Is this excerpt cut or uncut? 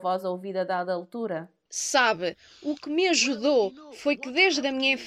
uncut